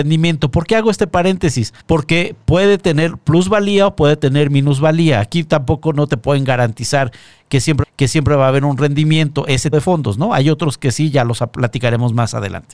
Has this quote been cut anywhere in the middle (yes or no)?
yes